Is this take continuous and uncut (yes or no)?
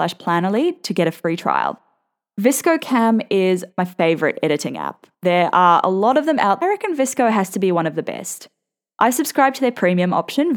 no